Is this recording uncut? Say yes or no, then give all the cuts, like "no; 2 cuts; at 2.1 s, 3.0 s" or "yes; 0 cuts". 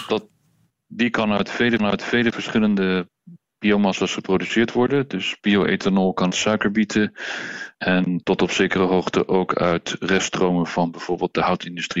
no; 3 cuts; at 1.8 s, 6.3 s, 7.7 s